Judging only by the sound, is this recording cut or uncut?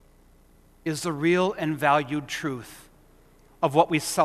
uncut